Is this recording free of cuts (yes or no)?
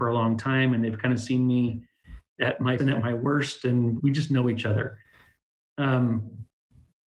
no